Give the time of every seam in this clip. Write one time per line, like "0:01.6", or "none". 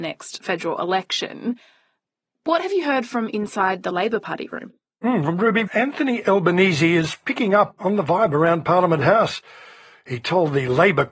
0:05.7
0:07.8